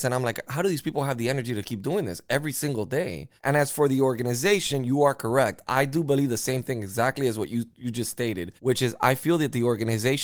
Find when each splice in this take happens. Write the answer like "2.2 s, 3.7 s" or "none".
3.4 s, 8.6 s